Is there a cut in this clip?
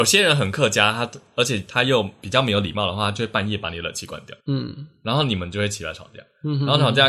yes; 1 cut; at 4.4 s

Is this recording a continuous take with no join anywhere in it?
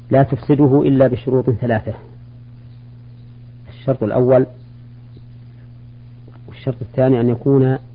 no; 1 cut; at 6.5 s

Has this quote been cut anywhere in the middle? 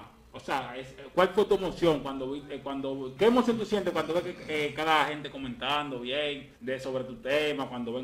yes; 2 cuts; at 3.2 s, 6.6 s

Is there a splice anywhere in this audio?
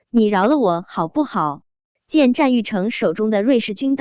yes; 1 cut; at 1.7 s

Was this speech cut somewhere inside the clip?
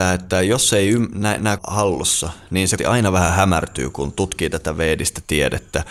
yes; 2 cuts; at 1.6 s, 2.8 s

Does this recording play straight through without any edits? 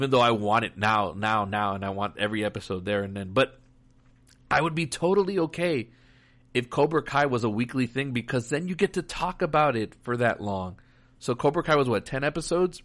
yes; 0 cuts

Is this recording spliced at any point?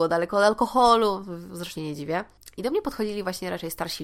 yes; 1 cut; at 1.8 s

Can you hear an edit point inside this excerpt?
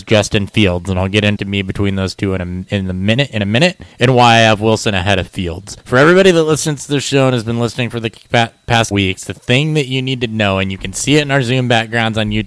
yes; 4 cuts; at 1.4 s, 3.9 s, 5.8 s, 8.9 s

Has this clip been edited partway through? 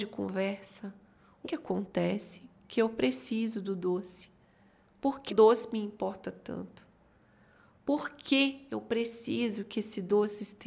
yes; 2 cuts; at 1.4 s, 5.3 s

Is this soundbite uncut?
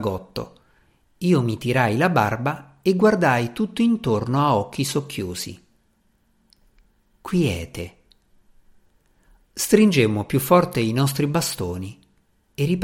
yes; 0 cuts

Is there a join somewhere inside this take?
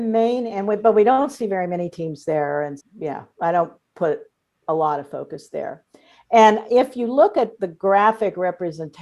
yes; 1 cut; at 2.8 s

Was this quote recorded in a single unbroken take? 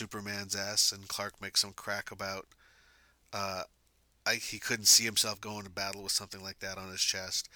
yes; 0 cuts

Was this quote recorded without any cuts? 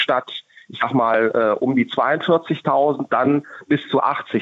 yes; 0 cuts

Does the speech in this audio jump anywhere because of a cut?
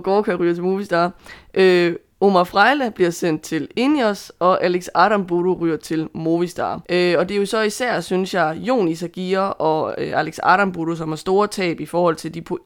yes; 1 cut; at 6.8 s

